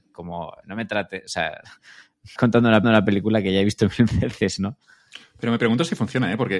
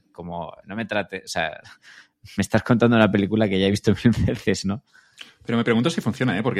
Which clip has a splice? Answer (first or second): first